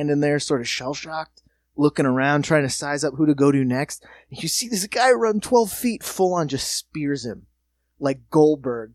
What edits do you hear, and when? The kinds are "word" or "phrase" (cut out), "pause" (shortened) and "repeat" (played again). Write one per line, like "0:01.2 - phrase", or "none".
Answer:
0:01.5 - pause